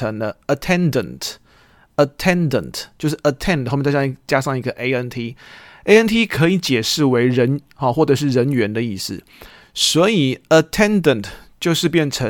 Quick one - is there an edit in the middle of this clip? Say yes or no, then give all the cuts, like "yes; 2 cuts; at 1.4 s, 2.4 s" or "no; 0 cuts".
no; 0 cuts